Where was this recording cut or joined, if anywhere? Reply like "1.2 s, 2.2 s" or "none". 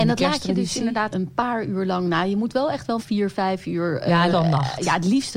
1.1 s, 3.0 s, 4.3 s